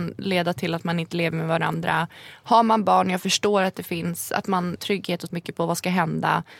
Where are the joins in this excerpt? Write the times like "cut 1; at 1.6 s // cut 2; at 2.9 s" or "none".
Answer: cut 1; at 4.8 s // cut 2; at 5.3 s

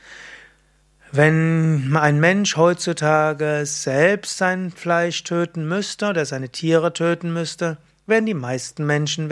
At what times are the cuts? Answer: none

